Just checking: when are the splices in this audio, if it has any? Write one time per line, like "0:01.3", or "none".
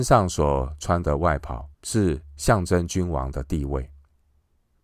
0:01.7